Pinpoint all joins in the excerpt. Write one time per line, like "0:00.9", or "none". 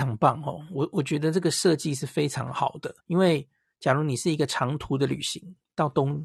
0:03.0